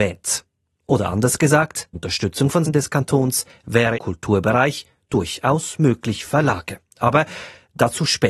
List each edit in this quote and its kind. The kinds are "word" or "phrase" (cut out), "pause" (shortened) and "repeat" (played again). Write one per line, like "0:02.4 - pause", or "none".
0:01.9 - word
0:02.7 - word
0:04.0 - word
0:06.3 - word